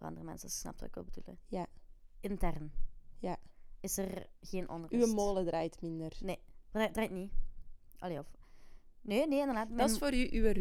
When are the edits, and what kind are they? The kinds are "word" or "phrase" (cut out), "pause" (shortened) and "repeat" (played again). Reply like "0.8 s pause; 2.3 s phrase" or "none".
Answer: none